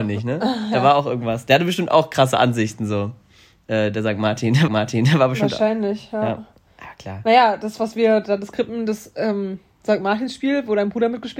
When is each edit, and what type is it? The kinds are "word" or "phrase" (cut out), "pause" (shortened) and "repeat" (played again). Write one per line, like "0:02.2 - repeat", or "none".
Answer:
0:04.7 - repeat